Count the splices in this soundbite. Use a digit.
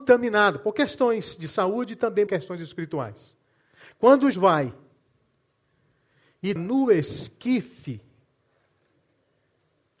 3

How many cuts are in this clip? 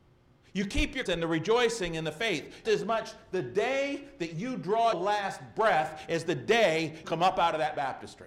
4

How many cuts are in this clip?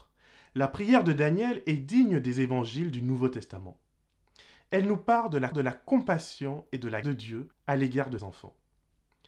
4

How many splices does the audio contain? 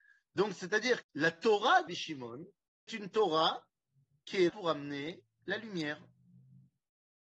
4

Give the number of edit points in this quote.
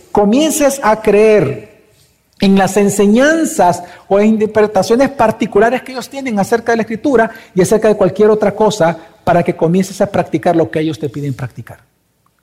0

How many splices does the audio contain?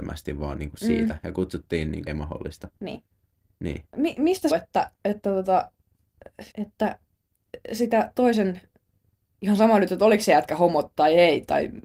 3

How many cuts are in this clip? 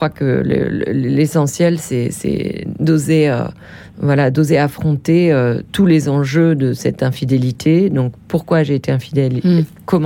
1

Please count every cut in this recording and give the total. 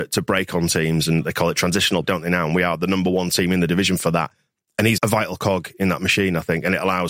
2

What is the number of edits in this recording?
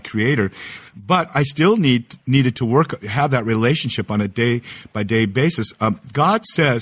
0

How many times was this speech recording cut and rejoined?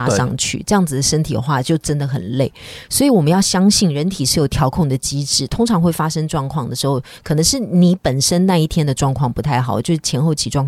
0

